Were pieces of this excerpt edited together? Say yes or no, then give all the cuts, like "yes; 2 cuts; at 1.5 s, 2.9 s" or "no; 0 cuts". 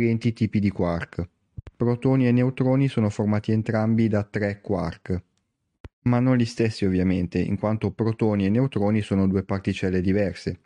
yes; 1 cut; at 1.7 s